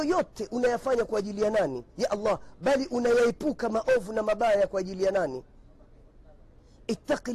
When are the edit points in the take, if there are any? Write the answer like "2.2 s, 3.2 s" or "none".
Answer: 1.9 s